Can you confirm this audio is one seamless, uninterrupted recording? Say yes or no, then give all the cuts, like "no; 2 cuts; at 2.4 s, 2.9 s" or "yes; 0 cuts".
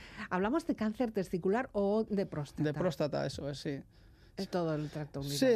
no; 2 cuts; at 2.1 s, 4.5 s